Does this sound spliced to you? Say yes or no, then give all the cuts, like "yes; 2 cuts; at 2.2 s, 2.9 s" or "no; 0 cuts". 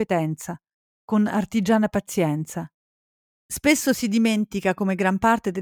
no; 0 cuts